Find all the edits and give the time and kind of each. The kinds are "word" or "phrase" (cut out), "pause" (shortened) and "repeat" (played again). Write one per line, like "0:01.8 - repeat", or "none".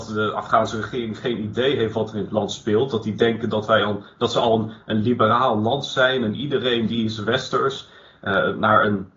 none